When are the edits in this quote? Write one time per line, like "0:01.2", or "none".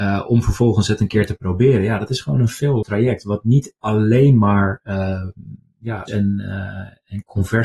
0:02.8
0:06.1